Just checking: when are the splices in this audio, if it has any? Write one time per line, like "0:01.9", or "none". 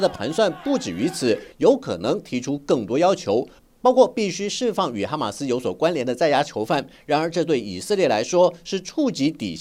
none